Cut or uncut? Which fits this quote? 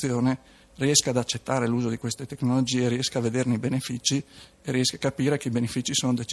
uncut